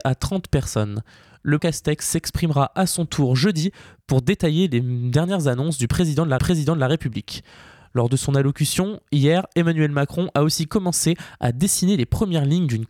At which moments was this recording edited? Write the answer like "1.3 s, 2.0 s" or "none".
1.6 s, 6.4 s